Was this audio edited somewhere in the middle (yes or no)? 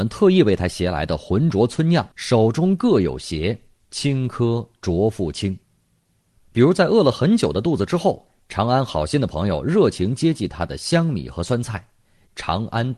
yes